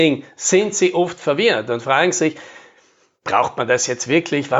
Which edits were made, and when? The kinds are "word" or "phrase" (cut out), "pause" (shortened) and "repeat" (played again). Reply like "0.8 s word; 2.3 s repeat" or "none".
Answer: none